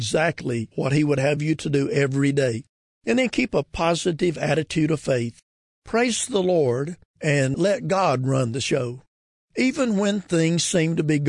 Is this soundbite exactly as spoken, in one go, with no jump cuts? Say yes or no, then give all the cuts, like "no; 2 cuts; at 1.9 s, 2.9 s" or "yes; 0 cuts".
yes; 0 cuts